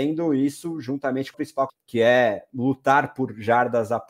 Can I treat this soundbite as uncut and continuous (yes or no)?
no